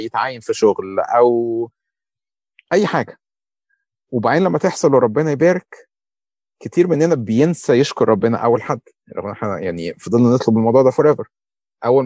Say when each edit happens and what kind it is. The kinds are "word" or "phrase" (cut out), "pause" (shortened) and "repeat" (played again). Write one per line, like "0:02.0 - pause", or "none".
none